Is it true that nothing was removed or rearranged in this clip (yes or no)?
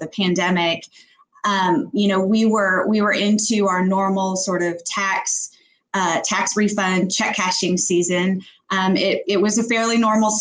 yes